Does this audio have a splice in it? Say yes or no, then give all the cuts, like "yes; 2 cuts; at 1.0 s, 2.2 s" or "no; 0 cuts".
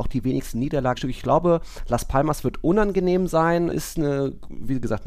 yes; 2 cuts; at 0.9 s, 3.7 s